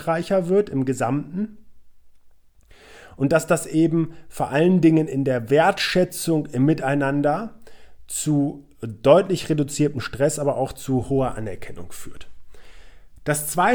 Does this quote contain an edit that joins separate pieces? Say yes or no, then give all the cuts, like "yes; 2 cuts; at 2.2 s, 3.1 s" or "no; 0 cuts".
no; 0 cuts